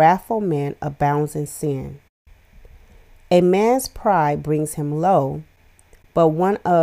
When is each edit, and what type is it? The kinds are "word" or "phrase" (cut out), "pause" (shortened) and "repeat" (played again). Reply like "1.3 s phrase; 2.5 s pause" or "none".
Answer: none

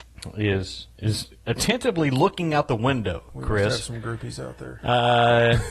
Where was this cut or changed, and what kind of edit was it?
1.4 s pause

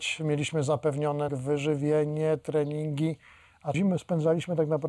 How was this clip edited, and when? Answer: 1.3 s word; 3.7 s word

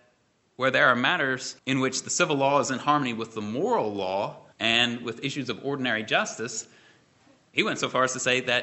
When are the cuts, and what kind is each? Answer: 1.6 s pause; 4.5 s pause

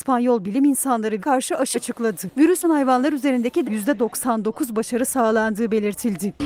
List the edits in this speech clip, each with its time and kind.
1.2 s word; 1.7 s word; 2.6 s word; 3.6 s word

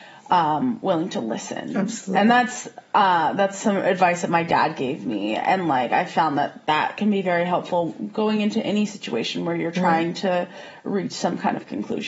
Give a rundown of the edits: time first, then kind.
none

